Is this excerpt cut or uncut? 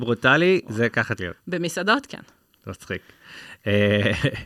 cut